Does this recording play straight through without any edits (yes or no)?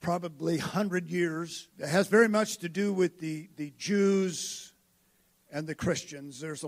no